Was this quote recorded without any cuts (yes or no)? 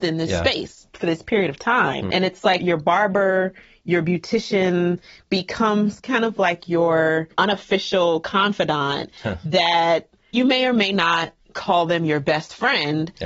yes